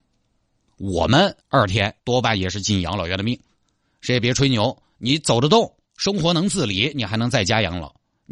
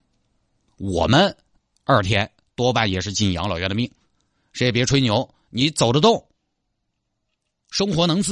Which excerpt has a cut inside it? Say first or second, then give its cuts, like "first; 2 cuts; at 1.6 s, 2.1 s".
first; 3 cuts; at 1.4 s, 2.0 s, 5.8 s